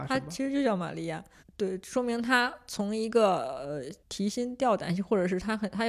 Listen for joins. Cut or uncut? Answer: cut